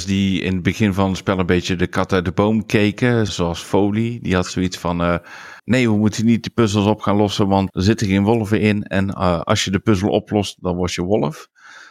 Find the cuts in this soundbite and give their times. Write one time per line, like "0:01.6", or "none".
0:03.3
0:05.6
0:07.7